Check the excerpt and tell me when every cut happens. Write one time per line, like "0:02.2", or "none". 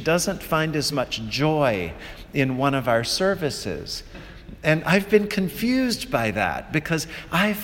none